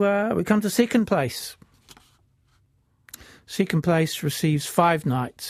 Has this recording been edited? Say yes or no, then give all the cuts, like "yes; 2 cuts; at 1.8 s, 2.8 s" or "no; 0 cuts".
no; 0 cuts